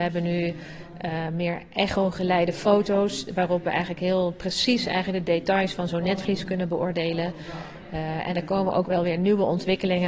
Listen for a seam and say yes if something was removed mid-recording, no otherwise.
no